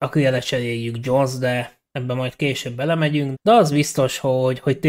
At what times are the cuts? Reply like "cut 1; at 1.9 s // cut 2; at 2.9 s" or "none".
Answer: cut 1; at 1.9 s // cut 2; at 3.3 s